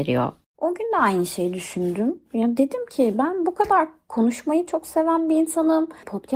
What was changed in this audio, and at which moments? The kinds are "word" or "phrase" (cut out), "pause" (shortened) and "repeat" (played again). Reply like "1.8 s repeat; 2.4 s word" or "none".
none